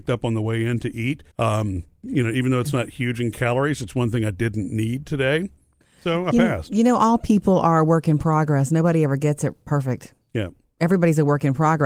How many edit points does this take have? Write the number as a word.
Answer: one